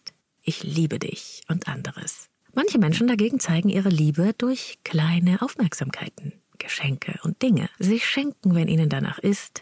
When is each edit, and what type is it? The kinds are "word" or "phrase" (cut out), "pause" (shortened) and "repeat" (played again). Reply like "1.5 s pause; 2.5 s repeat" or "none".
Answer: 2.3 s pause; 7.7 s pause